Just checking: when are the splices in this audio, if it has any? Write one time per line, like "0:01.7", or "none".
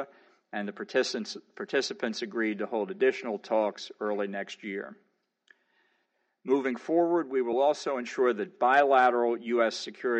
none